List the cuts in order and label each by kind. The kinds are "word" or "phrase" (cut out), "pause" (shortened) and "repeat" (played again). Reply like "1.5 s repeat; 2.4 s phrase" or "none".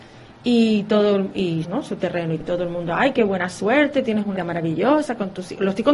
1.6 s phrase; 2.4 s word; 4.4 s word